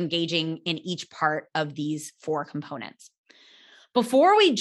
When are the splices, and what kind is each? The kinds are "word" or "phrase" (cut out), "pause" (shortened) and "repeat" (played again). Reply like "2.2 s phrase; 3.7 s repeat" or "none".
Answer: none